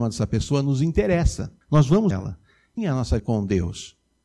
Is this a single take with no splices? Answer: no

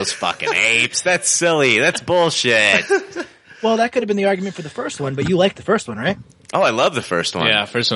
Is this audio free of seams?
yes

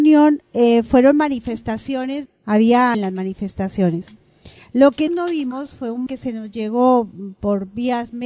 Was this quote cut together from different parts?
yes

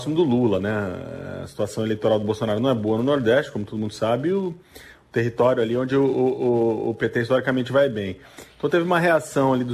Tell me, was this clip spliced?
no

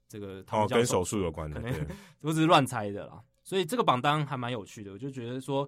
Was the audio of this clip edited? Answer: no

